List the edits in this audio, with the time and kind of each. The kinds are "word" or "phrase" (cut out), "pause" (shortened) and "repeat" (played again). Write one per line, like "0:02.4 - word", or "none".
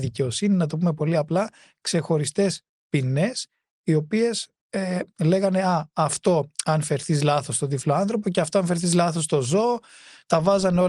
none